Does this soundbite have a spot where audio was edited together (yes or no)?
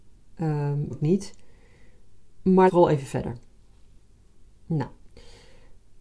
yes